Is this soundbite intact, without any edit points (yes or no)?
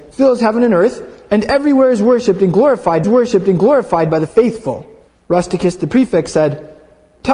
no